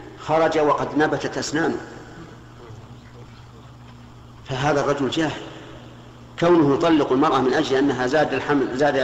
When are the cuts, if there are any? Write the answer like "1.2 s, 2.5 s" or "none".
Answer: none

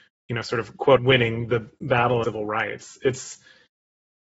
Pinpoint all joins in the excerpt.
1.0 s, 2.2 s

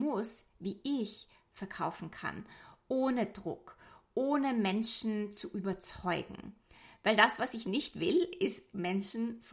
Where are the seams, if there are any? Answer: none

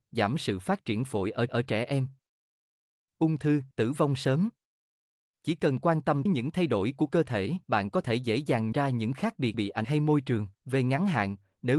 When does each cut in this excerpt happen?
1.5 s, 3.7 s, 6.3 s, 7.6 s, 8.7 s, 9.5 s, 9.8 s, 10.6 s

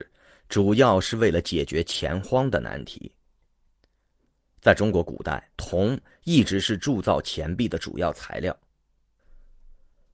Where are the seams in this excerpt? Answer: 5.5 s

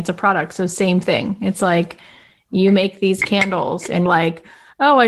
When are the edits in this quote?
4.1 s

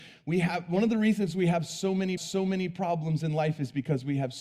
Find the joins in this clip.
2.2 s

